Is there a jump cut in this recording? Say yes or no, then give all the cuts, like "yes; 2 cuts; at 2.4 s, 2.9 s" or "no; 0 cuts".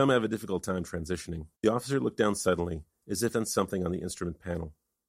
yes; 2 cuts; at 1.5 s, 3.3 s